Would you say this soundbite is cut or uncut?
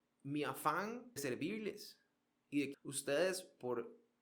cut